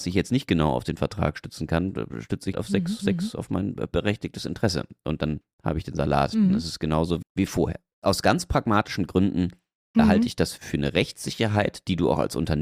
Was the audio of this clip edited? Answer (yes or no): yes